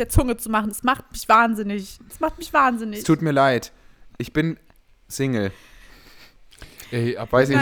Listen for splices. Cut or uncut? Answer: uncut